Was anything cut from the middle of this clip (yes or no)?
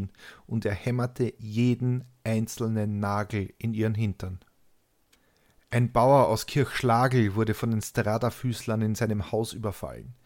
no